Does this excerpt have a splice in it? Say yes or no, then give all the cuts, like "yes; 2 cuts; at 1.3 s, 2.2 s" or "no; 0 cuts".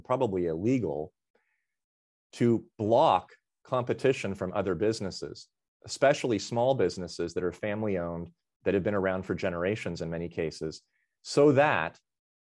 no; 0 cuts